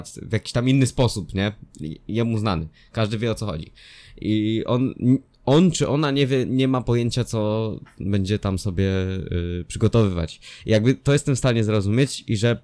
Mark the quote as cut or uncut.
uncut